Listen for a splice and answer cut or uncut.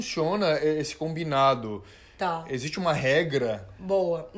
uncut